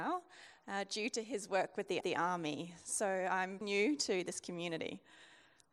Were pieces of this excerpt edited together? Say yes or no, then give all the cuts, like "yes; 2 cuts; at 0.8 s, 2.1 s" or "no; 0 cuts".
yes; 2 cuts; at 2.0 s, 3.6 s